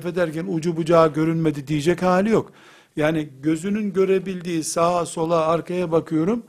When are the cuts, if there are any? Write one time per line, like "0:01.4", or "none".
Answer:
none

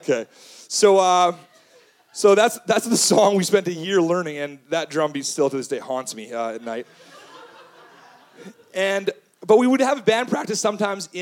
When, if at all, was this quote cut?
none

